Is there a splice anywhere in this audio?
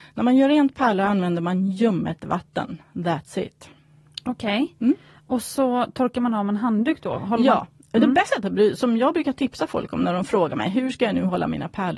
yes; 1 cut; at 8.3 s

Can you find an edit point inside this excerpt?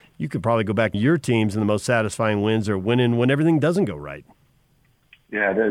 yes; 1 cut; at 0.9 s

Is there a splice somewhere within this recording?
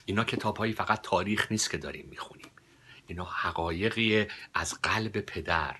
no; 0 cuts

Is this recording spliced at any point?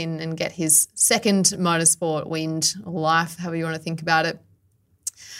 no; 0 cuts

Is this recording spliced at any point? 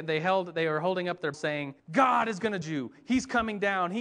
yes; 3 cuts; at 1.3 s, 1.8 s, 2.6 s

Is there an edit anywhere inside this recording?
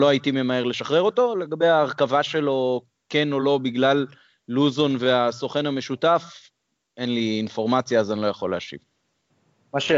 no; 0 cuts

